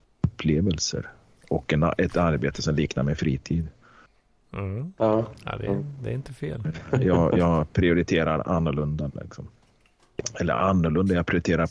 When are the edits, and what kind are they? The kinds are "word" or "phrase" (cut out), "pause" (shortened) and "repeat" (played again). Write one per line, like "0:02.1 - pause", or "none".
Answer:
none